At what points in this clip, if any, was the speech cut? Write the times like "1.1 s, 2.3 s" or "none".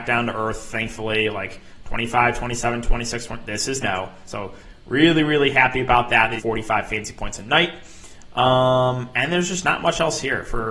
3.8 s, 6.4 s